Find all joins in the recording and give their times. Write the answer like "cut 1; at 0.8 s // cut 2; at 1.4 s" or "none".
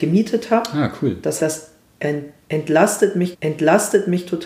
cut 1; at 1.4 s // cut 2; at 3.3 s